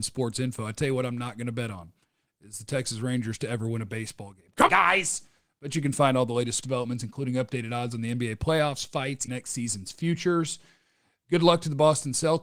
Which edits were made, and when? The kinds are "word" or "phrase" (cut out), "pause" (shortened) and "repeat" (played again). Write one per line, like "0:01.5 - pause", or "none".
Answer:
0:04.7 - word
0:06.6 - word
0:09.3 - word